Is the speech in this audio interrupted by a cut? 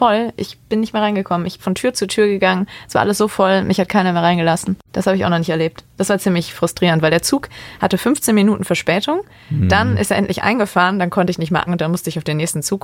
yes; 2 cuts; at 1.6 s, 11.7 s

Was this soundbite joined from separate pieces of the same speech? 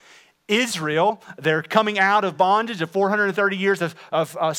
no; 0 cuts

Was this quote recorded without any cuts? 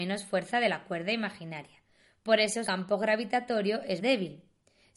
no; 2 cuts; at 2.6 s, 4.0 s

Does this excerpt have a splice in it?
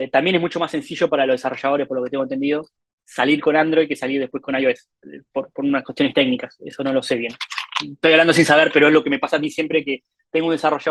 yes; 1 cut; at 2.8 s

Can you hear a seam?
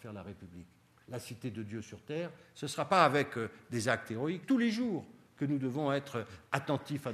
yes; 1 cut; at 4.4 s

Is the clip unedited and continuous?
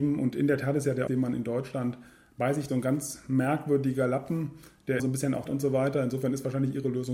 no; 4 cuts; at 1.1 s, 2.7 s, 5.0 s, 5.5 s

